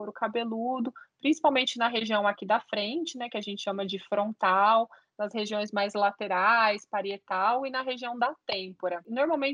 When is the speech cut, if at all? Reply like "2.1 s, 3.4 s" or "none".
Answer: none